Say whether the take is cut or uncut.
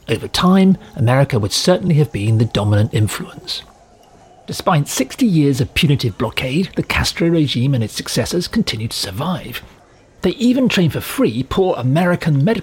uncut